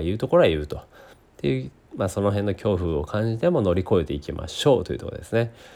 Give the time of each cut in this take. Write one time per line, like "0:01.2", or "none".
none